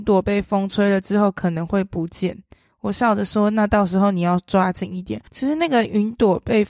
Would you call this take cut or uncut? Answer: cut